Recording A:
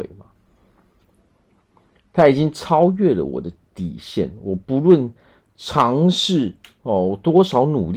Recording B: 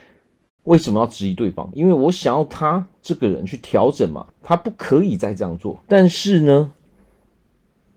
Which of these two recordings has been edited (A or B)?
B